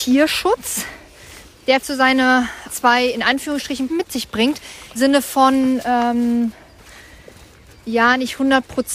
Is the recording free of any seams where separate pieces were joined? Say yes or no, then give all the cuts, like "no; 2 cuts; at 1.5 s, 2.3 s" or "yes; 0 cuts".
no; 4 cuts; at 1.8 s, 2.7 s, 3.9 s, 5.0 s